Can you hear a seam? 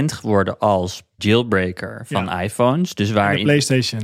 yes; 1 cut; at 1.2 s

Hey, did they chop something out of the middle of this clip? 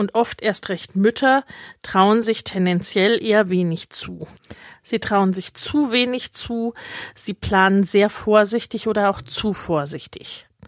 no; 0 cuts

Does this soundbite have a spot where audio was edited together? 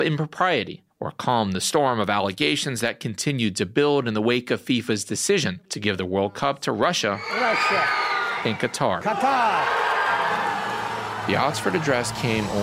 yes; 2 cuts; at 0.9 s, 5.7 s

